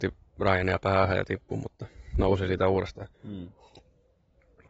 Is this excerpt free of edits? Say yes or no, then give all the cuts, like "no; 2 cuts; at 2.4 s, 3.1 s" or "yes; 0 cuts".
no; 1 cut; at 3.1 s